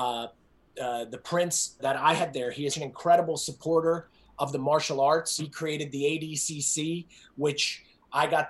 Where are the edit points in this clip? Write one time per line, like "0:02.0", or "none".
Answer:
0:01.8
0:02.3
0:02.7
0:05.4

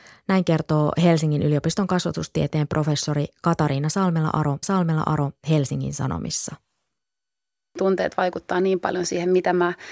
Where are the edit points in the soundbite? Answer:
0:04.6

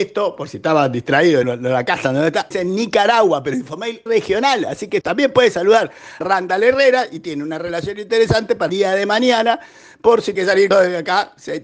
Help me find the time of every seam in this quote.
0:01.4
0:02.5
0:04.1
0:05.0
0:06.2
0:08.7
0:10.4
0:10.7

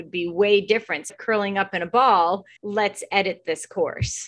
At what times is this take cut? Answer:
0:01.1
0:02.6

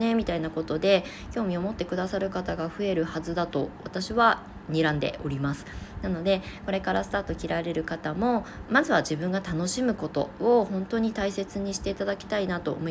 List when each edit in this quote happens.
0:08.7

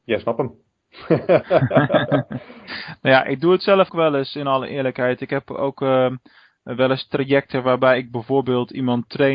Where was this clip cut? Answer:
0:03.9

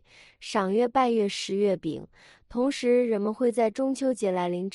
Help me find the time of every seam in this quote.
none

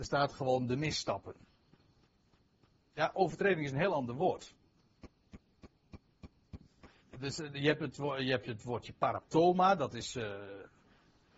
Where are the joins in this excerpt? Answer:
none

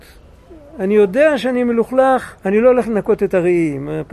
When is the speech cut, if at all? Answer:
0:02.4

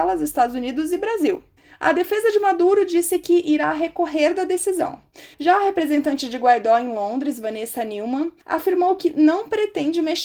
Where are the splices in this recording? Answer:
0:01.6
0:05.3
0:08.4

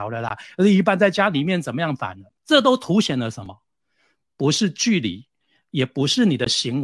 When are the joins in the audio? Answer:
0:02.4

